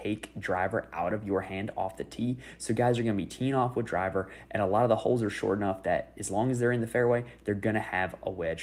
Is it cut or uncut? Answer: uncut